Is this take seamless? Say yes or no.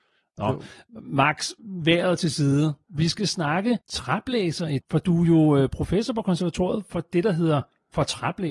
no